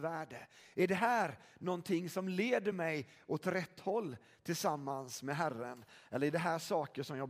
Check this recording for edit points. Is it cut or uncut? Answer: uncut